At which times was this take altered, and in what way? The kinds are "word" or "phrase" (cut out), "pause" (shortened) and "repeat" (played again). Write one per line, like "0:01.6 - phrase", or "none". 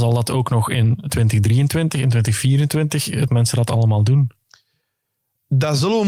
0:03.3 - phrase